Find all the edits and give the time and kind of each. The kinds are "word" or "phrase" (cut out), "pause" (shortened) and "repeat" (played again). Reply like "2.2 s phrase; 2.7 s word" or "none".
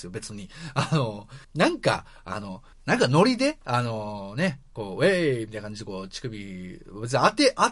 1.4 s pause; 2.7 s pause